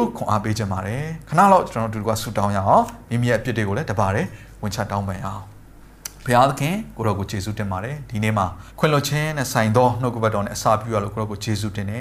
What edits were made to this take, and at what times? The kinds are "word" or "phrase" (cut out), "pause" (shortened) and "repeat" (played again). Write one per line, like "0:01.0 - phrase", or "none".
0:08.7 - pause